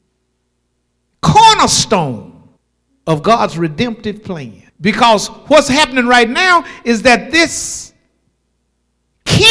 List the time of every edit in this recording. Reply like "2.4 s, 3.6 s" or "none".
2.6 s, 4.7 s